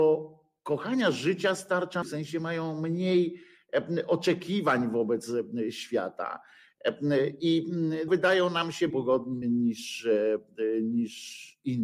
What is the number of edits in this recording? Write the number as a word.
four